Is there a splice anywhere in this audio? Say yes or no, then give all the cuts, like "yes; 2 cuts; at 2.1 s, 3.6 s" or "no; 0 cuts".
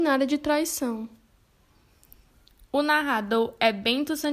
no; 0 cuts